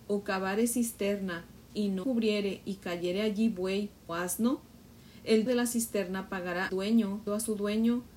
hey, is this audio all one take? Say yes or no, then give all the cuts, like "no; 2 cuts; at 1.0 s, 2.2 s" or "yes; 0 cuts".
no; 5 cuts; at 2.0 s, 4.1 s, 5.5 s, 6.7 s, 7.3 s